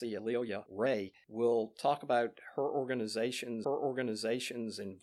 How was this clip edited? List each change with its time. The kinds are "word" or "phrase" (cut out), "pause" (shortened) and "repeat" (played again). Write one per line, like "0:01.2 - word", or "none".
0:03.6 - repeat